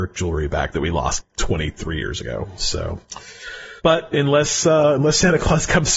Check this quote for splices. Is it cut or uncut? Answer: cut